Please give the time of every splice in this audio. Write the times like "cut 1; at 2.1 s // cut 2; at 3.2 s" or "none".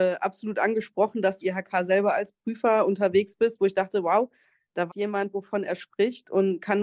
cut 1; at 1.4 s // cut 2; at 4.9 s